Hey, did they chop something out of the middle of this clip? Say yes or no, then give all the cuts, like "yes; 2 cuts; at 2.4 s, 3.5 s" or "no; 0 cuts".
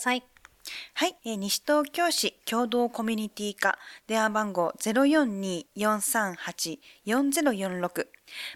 yes; 2 cuts; at 1.2 s, 5.7 s